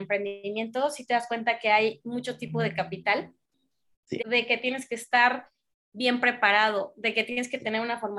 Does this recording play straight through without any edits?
no; 1 cut; at 4.2 s

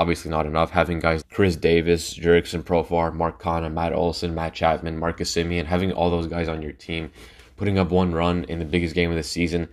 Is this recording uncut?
no; 1 cut; at 1.2 s

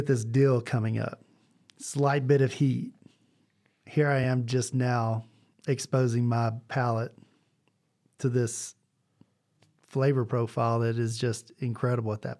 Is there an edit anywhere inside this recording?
no; 0 cuts

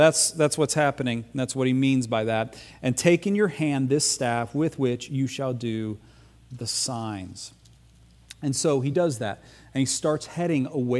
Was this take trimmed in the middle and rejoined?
no; 0 cuts

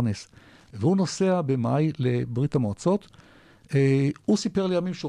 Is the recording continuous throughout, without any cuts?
yes; 0 cuts

